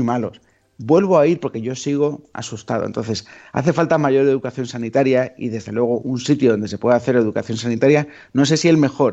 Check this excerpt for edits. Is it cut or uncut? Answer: uncut